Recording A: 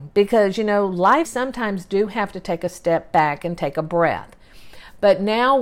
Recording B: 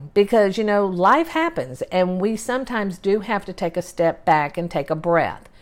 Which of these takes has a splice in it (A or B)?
A